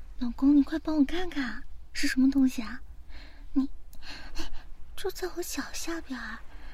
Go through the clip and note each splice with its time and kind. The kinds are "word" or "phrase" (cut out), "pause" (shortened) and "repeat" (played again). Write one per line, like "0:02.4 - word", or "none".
none